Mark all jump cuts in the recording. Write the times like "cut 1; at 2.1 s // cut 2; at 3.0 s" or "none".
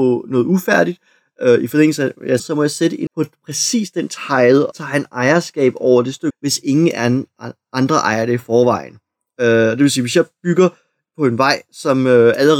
cut 1; at 2.4 s // cut 2; at 3.1 s // cut 3; at 4.7 s // cut 4; at 6.3 s